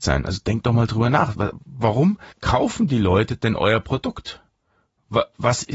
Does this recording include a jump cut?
yes; 1 cut; at 2.3 s

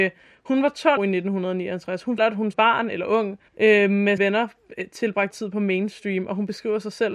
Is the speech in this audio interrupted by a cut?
yes; 6 cuts; at 1.0 s, 2.2 s, 2.5 s, 3.5 s, 4.2 s, 5.3 s

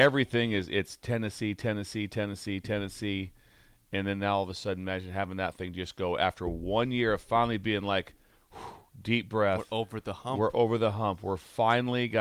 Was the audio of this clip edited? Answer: no; 0 cuts

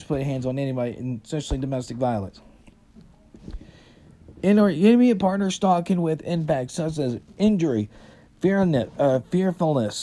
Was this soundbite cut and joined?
no; 0 cuts

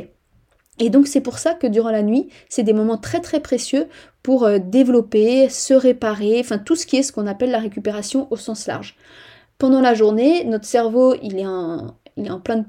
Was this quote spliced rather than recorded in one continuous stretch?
no; 0 cuts

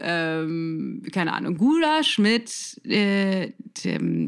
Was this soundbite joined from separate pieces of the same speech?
no; 0 cuts

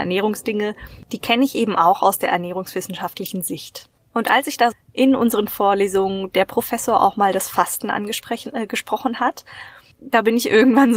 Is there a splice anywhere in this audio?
yes; 1 cut; at 4.7 s

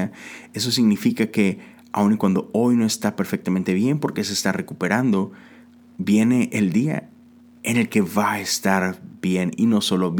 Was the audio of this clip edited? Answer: no; 0 cuts

